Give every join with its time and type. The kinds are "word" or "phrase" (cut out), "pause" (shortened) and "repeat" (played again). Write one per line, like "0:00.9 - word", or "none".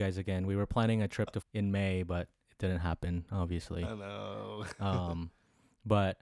0:01.4 - word